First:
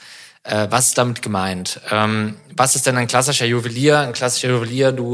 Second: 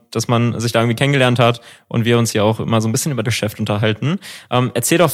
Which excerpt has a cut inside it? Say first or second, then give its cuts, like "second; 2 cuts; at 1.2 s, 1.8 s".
second; 2 cuts; at 2.3 s, 3.2 s